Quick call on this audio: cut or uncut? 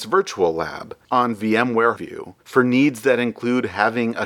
cut